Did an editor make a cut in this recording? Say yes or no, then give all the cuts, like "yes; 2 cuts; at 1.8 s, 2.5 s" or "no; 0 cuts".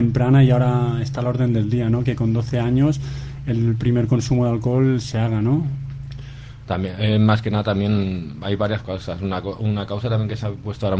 no; 0 cuts